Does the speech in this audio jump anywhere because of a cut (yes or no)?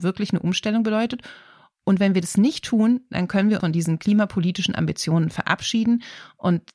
yes